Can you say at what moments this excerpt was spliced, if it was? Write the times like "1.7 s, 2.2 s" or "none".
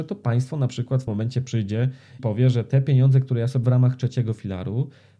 1.1 s, 2.2 s, 3.6 s